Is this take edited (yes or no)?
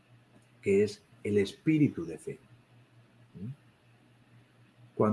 yes